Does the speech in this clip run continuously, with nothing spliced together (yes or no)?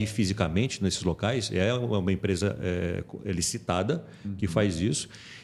yes